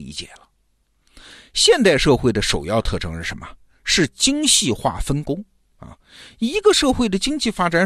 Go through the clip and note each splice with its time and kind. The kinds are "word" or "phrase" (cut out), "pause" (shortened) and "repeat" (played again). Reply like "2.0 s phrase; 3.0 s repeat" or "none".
none